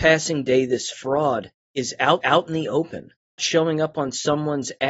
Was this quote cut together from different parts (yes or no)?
yes